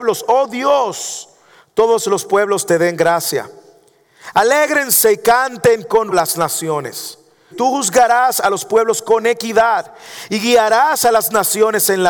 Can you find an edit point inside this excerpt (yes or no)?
yes